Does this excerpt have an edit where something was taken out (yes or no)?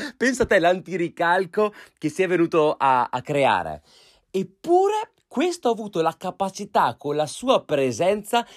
no